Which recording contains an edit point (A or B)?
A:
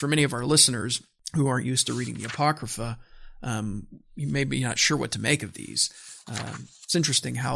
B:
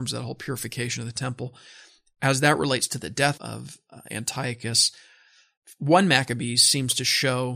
B